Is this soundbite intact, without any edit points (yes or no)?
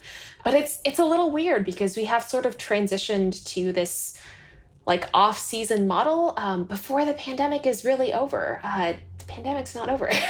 yes